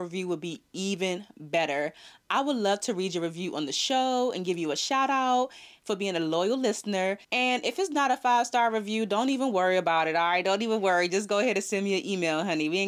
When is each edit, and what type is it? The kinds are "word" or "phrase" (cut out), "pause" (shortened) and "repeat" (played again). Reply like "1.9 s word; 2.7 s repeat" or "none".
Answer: 7.2 s pause